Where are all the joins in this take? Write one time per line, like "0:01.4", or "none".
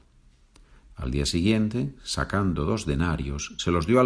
none